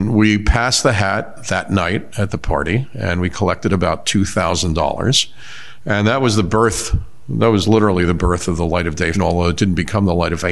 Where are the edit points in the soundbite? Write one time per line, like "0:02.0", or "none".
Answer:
0:09.1